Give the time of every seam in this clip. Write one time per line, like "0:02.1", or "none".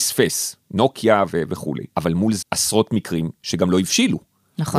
0:01.9
0:02.4